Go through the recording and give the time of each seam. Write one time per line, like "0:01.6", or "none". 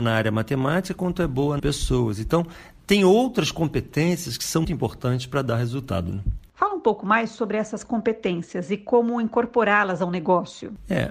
0:01.6
0:04.6